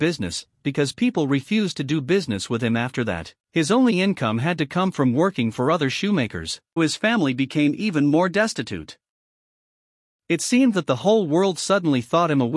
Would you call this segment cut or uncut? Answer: cut